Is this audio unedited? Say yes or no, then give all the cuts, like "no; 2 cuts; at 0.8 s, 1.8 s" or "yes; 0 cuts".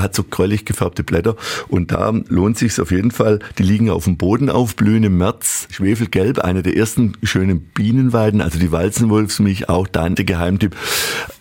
no; 1 cut; at 10.2 s